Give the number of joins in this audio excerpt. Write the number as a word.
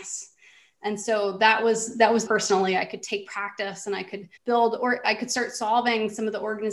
two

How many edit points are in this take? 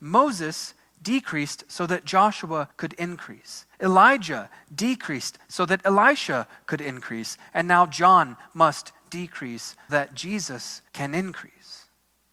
four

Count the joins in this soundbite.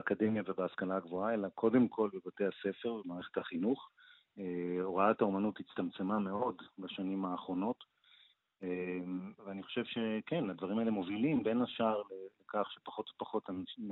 zero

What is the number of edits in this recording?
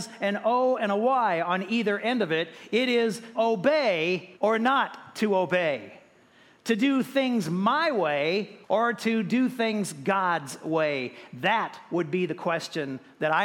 three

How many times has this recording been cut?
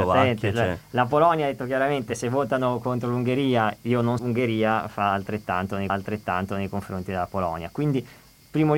two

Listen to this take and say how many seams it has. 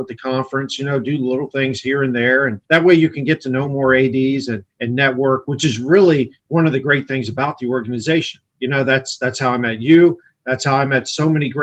four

